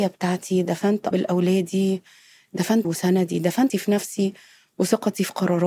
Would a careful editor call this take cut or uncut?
cut